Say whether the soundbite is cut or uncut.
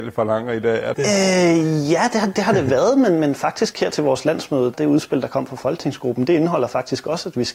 cut